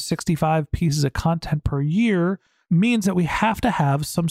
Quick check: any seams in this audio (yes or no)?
no